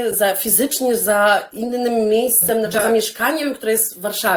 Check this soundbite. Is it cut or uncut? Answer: uncut